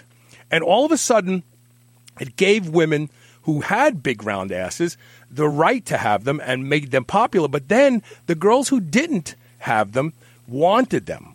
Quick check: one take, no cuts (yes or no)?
yes